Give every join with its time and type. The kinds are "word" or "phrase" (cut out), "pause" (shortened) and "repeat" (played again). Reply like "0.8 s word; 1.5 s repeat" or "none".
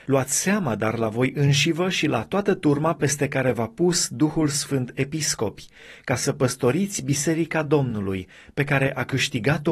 none